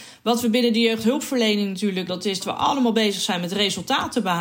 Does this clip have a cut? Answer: yes; 2 cuts; at 2.1 s, 2.4 s

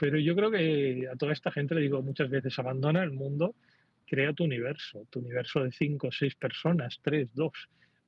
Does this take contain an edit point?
yes; 1 cut; at 4.0 s

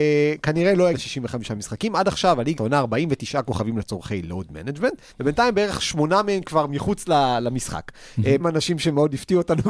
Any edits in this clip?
yes; 4 cuts; at 0.9 s, 2.6 s, 5.1 s, 8.4 s

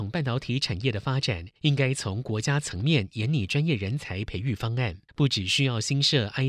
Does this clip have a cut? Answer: yes; 2 cuts; at 1.6 s, 5.1 s

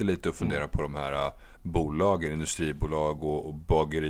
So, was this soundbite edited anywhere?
no; 0 cuts

